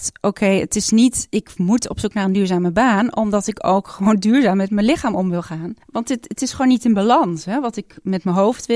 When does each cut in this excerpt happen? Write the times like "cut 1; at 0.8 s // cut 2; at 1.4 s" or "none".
cut 1; at 5.8 s